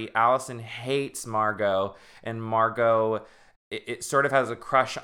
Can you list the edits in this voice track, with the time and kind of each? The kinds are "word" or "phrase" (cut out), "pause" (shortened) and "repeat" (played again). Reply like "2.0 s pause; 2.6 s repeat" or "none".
none